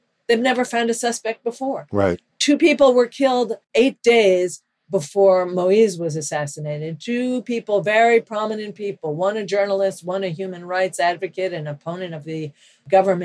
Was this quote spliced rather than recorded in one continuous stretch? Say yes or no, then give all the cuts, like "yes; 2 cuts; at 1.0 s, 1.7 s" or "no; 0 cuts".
yes; 1 cut; at 3.6 s